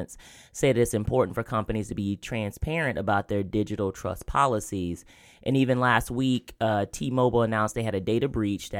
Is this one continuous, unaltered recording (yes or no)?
yes